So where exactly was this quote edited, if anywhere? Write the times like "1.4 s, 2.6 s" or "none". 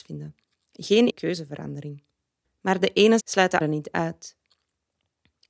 1.1 s, 2.4 s, 3.2 s, 3.6 s